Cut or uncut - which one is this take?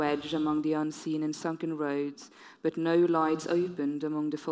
uncut